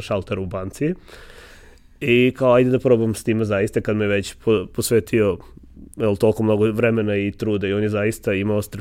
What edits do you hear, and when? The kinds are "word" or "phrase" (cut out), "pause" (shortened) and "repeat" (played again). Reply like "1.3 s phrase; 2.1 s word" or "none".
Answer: none